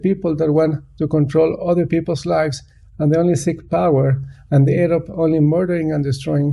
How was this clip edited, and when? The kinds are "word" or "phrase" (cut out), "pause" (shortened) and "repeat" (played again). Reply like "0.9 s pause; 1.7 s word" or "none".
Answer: none